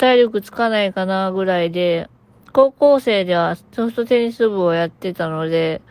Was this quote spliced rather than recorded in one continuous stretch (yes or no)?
no